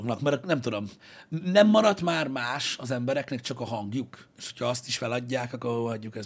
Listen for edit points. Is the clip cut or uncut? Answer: uncut